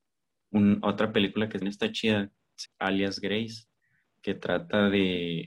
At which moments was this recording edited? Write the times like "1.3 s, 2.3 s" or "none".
1.6 s, 2.7 s